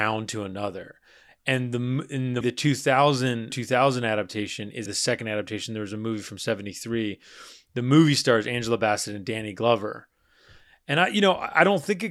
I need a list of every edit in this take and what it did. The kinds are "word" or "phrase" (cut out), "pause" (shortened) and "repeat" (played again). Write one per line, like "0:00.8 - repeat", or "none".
0:02.4 - word
0:03.5 - word
0:04.9 - word

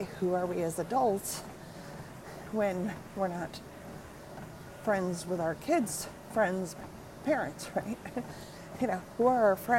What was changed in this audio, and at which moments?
none

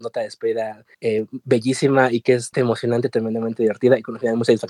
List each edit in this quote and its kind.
0:00.9 - pause
0:02.5 - word

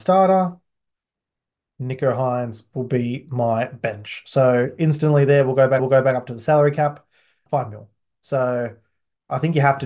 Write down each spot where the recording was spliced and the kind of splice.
0:05.8 - repeat
0:07.5 - word

